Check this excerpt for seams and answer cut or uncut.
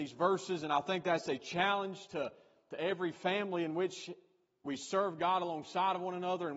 uncut